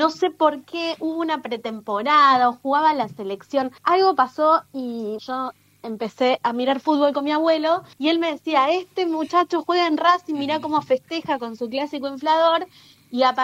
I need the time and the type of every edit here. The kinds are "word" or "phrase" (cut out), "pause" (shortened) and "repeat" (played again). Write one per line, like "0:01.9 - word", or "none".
0:03.8 - pause
0:05.2 - word
0:07.9 - pause

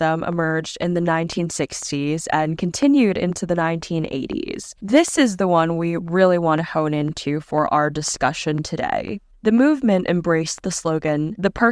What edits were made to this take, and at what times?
0:04.8 - pause

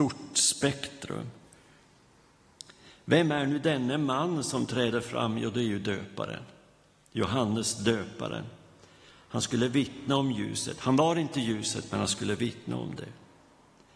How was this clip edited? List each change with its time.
none

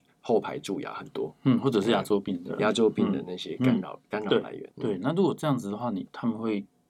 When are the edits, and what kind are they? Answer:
0:04.7 - pause

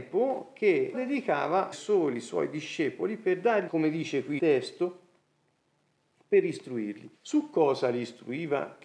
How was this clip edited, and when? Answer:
0:00.9 - word
0:01.7 - word
0:03.7 - phrase
0:04.4 - word
0:07.2 - pause

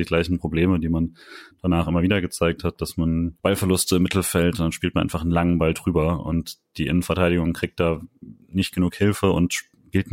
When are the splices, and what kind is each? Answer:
0:03.4 - pause

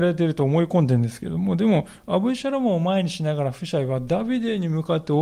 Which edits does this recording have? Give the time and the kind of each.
none

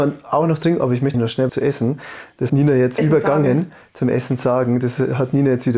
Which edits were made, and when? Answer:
0:01.1 - word
0:01.5 - word
0:02.5 - word
0:03.0 - word

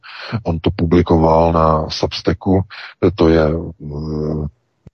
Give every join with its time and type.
none

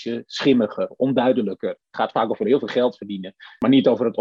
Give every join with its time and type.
none

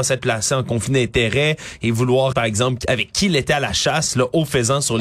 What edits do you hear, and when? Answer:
0:02.3 - word

